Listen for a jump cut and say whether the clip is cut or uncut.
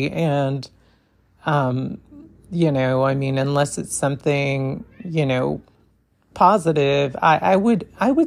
uncut